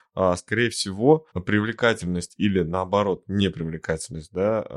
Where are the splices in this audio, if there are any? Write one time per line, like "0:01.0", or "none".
0:01.3

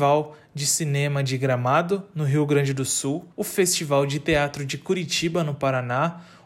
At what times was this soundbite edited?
0:03.3

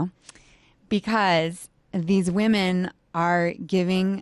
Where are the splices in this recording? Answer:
0:01.8

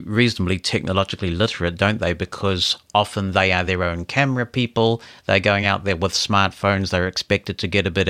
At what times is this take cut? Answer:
none

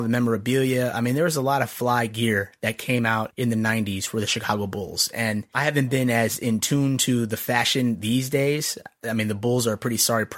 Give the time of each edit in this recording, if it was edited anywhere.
none

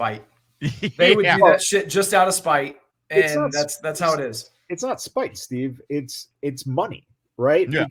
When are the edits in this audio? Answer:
none

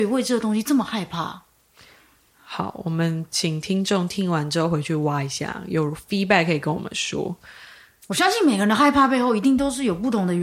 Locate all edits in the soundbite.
none

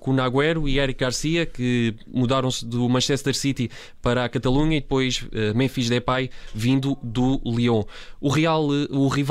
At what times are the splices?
none

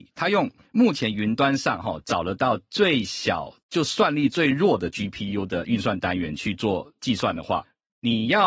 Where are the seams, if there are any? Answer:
0:03.6

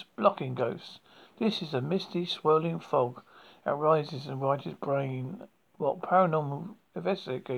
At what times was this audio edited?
none

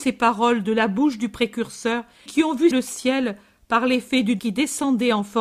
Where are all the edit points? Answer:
0:02.3
0:02.7
0:04.4

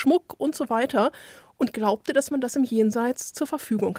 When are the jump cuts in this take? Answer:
none

